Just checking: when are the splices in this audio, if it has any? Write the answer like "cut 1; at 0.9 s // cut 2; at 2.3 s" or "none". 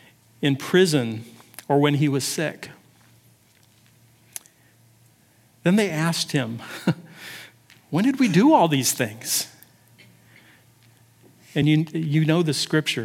none